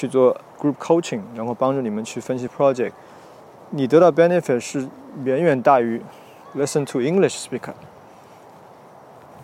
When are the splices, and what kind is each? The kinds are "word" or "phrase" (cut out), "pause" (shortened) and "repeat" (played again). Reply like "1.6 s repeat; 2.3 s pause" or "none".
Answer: none